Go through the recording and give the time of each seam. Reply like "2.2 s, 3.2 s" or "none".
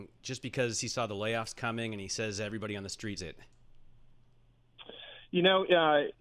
3.2 s